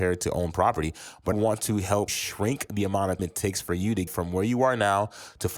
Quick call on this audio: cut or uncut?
cut